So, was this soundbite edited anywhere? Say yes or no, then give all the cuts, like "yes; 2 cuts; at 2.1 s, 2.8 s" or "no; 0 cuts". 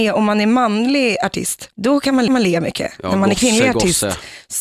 yes; 2 cuts; at 1.7 s, 2.3 s